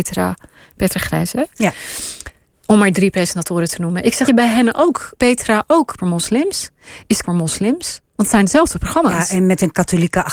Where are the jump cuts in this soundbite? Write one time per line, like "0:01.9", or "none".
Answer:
0:02.4
0:04.3
0:05.2
0:06.0
0:07.2